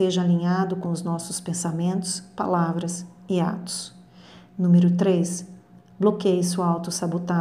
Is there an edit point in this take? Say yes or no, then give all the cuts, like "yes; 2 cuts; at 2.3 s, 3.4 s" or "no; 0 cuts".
no; 0 cuts